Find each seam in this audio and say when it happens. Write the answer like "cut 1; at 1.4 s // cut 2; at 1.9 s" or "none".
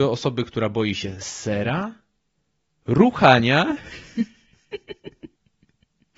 none